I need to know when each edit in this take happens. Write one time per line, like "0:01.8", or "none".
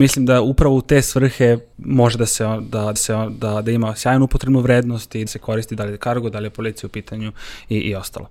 0:01.7
0:03.0
0:05.3

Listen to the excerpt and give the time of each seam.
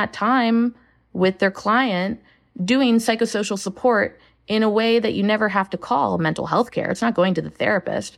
none

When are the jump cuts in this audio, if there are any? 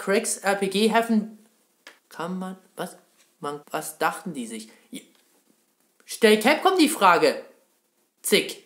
0:02.0
0:03.6

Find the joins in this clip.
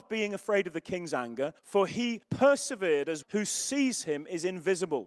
0:01.6
0:02.2
0:03.2

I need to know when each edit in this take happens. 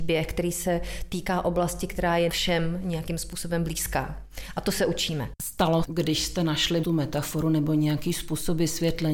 0:02.3
0:05.8
0:06.8

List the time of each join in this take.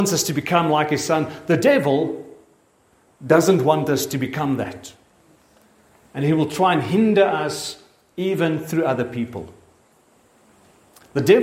none

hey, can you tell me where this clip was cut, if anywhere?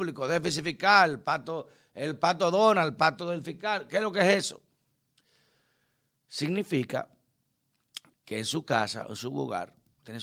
none

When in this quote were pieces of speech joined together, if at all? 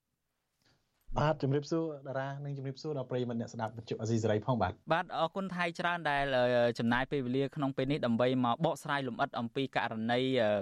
0:04.8

